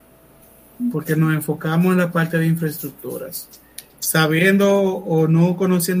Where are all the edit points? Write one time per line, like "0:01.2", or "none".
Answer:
0:03.9